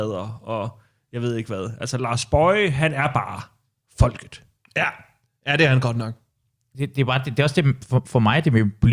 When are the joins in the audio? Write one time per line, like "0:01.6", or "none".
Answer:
none